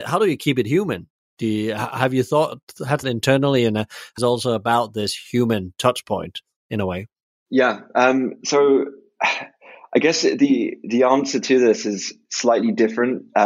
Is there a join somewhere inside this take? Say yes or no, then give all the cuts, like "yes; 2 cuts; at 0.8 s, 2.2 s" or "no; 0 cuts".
yes; 2 cuts; at 3.0 s, 4.2 s